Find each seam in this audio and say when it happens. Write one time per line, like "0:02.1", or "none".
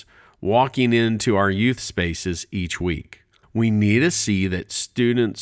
0:03.4